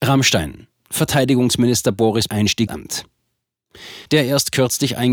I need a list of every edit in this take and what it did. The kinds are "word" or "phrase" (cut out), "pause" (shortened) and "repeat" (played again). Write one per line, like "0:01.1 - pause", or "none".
0:02.3 - word
0:02.7 - word
0:04.0 - pause